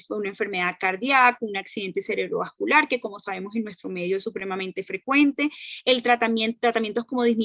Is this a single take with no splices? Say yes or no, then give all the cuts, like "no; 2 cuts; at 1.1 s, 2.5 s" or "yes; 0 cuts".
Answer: yes; 0 cuts